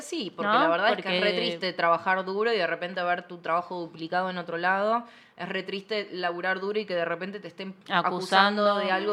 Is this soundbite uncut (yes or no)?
no